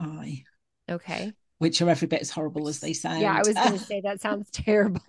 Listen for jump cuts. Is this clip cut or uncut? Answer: uncut